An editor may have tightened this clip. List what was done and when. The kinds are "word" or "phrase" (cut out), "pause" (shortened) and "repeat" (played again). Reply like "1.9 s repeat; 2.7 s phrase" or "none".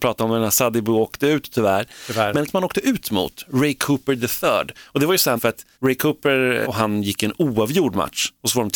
2.5 s word; 5.4 s phrase; 5.7 s pause; 6.6 s word

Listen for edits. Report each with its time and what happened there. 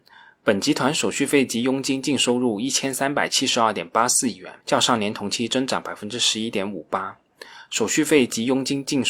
4.6 s pause

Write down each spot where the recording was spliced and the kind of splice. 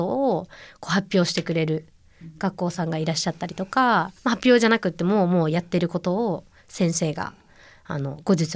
4.2 s pause

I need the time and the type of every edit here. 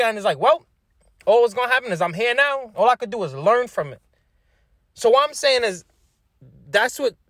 none

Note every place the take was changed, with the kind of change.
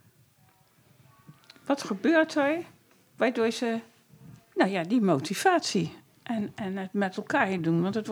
none

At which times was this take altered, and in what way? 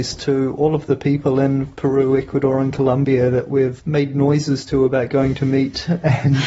3.8 s word

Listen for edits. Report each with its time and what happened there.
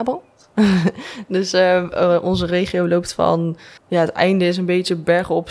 3.8 s pause

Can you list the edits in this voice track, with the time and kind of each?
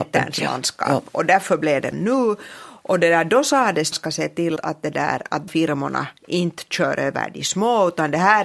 1.9 s word; 3.9 s phrase; 4.6 s word; 5.5 s phrase; 6.2 s pause

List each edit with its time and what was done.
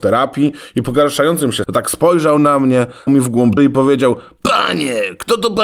1.6 s word; 3.1 s word; 3.6 s word

